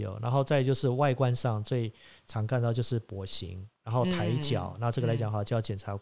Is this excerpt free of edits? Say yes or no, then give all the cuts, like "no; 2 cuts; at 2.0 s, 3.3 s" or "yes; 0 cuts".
yes; 0 cuts